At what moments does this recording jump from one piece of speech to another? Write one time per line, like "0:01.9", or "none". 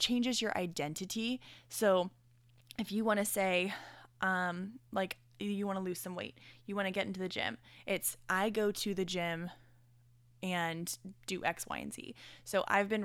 none